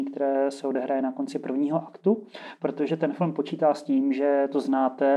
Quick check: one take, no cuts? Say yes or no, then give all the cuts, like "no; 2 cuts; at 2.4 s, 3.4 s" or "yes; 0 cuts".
yes; 0 cuts